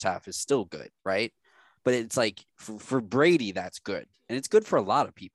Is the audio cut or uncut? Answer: cut